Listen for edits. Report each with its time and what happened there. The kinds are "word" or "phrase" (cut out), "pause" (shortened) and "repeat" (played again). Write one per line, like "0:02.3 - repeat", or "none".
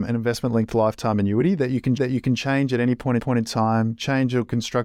0:02.0 - repeat
0:03.2 - repeat